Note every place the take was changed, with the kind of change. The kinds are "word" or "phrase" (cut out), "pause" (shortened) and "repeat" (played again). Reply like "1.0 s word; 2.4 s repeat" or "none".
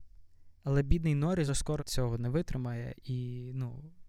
1.5 s word; 1.8 s word

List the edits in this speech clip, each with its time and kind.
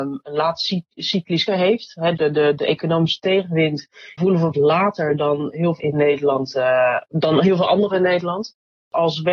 1.5 s word; 2.2 s word; 4.2 s word; 4.5 s word; 5.8 s word; 7.0 s word; 7.9 s word

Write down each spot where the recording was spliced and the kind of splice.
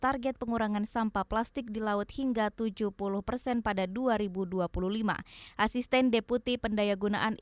none

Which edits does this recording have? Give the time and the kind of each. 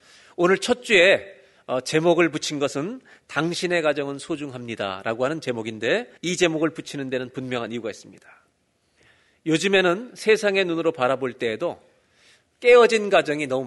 6.2 s pause

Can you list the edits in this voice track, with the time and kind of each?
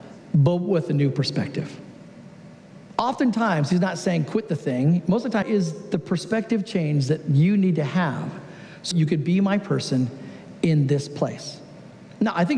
5.4 s phrase; 8.9 s word

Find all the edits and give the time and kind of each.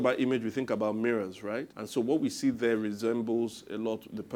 1.7 s pause

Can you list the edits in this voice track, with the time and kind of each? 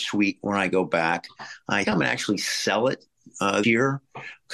1.8 s word; 3.6 s word

